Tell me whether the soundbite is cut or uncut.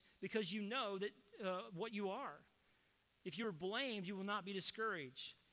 uncut